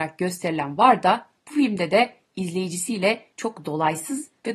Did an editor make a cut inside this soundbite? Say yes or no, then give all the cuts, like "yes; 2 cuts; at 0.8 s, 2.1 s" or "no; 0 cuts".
yes; 1 cut; at 1.4 s